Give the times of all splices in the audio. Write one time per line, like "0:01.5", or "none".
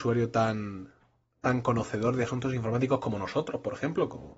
none